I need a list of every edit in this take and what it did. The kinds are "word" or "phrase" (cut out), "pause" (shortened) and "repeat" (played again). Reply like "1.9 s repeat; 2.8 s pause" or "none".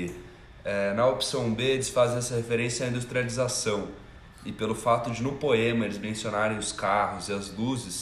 none